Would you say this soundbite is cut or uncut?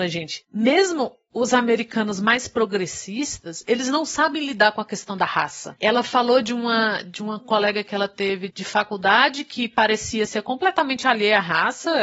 cut